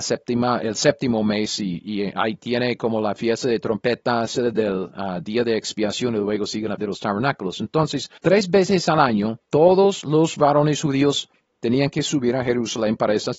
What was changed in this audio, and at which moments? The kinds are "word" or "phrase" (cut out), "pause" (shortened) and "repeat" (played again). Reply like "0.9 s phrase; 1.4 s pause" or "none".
4.3 s phrase; 6.8 s word; 8.2 s pause; 9.4 s pause